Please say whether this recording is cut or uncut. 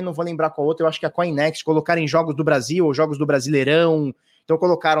uncut